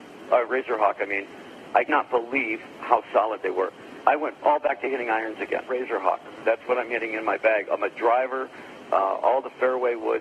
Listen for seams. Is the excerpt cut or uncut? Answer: cut